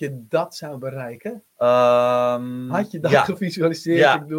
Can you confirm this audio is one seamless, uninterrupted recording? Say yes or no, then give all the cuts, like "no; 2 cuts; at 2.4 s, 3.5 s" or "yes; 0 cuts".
no; 1 cut; at 1.5 s